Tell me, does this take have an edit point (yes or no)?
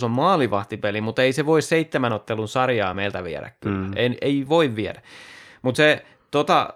no